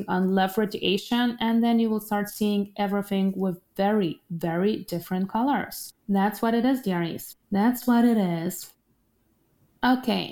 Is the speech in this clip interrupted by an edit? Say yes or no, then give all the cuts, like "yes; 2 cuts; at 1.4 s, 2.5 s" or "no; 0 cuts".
yes; 2 cuts; at 6.0 s, 7.4 s